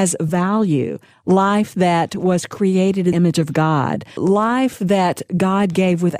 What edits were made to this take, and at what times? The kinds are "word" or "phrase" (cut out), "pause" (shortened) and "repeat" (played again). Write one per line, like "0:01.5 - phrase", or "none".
0:03.1 - word
0:04.2 - word